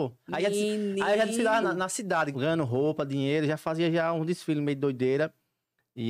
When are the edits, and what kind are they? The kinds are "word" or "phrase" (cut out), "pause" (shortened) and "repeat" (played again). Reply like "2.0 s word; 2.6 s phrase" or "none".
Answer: 1.6 s word; 2.3 s word